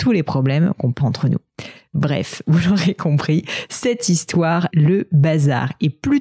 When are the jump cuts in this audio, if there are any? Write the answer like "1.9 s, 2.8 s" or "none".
1.0 s, 4.7 s